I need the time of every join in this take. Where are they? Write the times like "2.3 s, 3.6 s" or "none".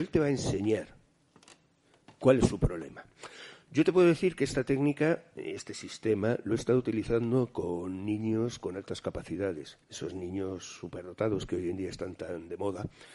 9.8 s